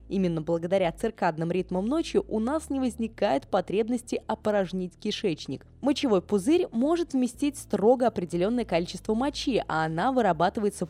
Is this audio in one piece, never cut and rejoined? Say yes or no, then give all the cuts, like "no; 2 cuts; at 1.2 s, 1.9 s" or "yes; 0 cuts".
yes; 0 cuts